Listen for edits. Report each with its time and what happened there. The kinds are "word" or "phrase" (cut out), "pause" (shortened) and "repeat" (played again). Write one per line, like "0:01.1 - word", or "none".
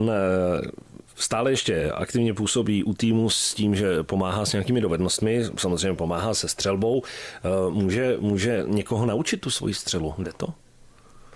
none